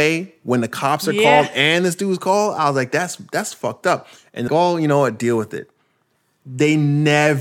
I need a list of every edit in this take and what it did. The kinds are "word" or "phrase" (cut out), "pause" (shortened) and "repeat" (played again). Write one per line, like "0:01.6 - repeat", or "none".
0:04.5 - word